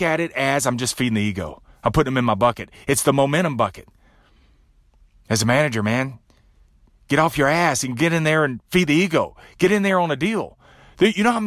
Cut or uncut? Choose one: uncut